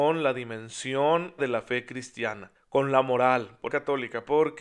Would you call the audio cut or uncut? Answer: cut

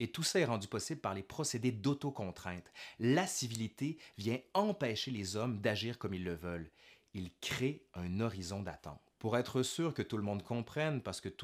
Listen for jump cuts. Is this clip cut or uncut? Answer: uncut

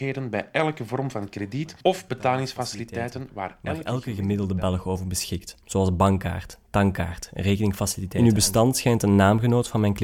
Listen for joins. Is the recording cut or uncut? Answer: cut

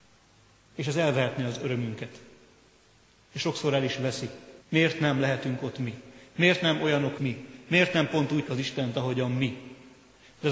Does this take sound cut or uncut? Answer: cut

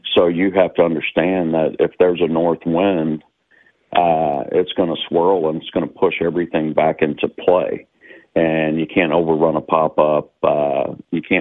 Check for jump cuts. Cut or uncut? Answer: uncut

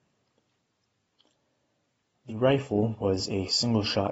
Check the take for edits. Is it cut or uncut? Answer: uncut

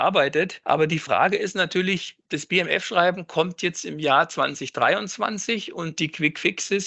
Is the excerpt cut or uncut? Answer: uncut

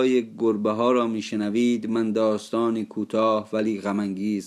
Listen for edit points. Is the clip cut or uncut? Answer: uncut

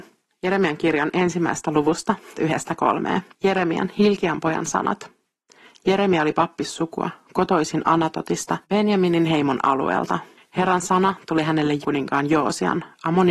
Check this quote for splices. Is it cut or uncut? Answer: cut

